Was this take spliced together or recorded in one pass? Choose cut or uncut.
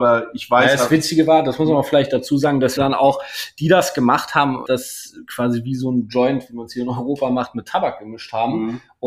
cut